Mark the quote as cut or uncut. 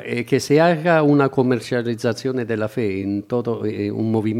uncut